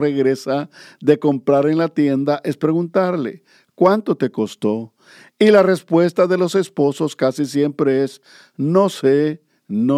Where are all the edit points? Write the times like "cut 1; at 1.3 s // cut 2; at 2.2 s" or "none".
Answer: none